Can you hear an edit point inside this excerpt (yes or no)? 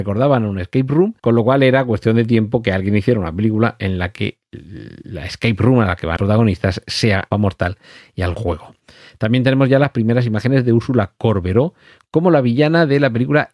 yes